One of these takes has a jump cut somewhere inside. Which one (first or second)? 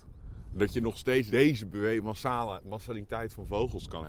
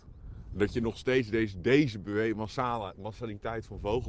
first